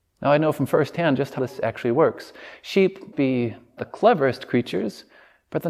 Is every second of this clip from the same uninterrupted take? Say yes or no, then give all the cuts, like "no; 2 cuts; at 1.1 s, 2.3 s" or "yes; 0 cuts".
no; 3 cuts; at 1.4 s, 3.1 s, 3.8 s